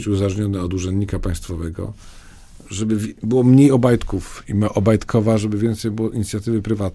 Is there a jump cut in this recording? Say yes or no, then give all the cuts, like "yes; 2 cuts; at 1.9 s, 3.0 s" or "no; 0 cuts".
no; 0 cuts